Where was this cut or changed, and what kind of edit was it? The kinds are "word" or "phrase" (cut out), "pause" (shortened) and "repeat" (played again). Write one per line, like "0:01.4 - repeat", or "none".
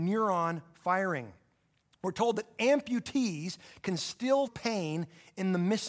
0:04.5 - word